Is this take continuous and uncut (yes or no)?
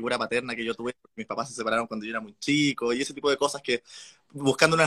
no